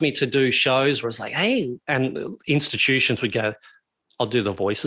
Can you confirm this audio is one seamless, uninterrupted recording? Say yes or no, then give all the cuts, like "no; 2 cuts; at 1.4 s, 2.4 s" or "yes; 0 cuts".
no; 1 cut; at 1.0 s